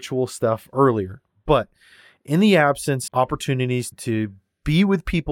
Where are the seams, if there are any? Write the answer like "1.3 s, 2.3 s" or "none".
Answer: 3.1 s, 3.9 s